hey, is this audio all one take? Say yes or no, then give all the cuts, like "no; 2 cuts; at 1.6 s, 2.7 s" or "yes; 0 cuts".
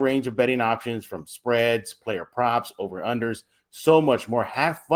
yes; 0 cuts